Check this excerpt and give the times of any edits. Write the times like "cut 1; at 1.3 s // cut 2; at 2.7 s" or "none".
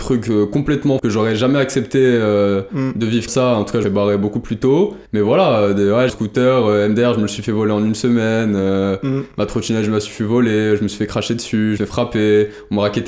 cut 1; at 1.0 s // cut 2; at 3.3 s // cut 3; at 3.8 s // cut 4; at 5.1 s // cut 5; at 6.1 s // cut 6; at 11.8 s